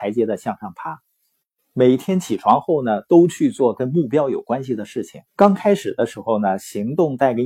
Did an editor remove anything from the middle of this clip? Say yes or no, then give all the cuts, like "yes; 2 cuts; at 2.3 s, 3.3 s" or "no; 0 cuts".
yes; 1 cut; at 5.3 s